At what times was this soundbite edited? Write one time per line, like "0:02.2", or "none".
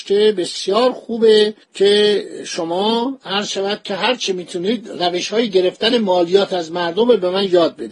0:01.6